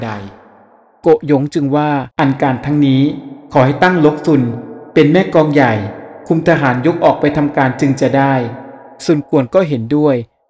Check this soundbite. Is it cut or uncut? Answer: cut